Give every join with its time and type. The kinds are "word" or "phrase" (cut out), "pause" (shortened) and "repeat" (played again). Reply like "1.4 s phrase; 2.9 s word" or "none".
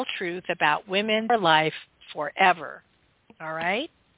1.3 s phrase